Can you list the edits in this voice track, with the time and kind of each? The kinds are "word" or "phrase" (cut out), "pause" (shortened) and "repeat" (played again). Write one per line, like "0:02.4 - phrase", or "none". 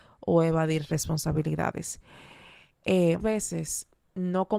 0:03.2 - word